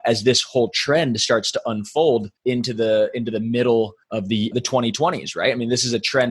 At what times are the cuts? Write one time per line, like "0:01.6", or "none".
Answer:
0:02.4
0:04.0
0:04.5